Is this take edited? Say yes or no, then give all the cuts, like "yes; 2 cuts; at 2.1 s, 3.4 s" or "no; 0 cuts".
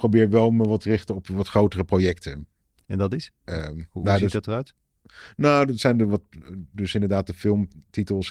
no; 0 cuts